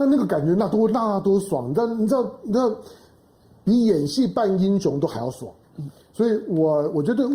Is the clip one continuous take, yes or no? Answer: yes